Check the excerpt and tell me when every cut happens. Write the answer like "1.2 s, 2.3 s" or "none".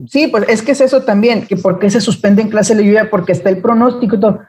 1.5 s